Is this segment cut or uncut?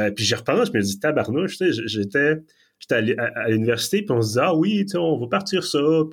uncut